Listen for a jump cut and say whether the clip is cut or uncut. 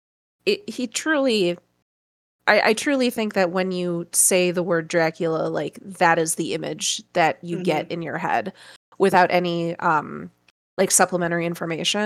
uncut